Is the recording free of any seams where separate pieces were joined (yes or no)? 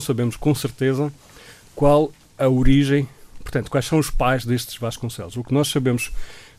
yes